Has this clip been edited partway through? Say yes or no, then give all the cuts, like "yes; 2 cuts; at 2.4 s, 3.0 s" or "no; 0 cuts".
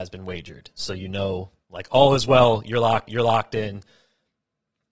yes; 1 cut; at 3.1 s